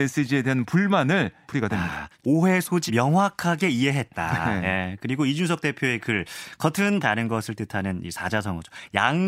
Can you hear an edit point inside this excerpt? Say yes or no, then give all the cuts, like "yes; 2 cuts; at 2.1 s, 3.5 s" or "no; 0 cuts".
yes; 4 cuts; at 1.5 s, 2.2 s, 2.9 s, 7.0 s